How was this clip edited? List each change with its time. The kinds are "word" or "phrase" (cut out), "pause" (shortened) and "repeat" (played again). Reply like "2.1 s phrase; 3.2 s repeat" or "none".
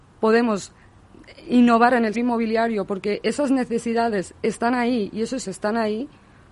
2.1 s word; 5.4 s word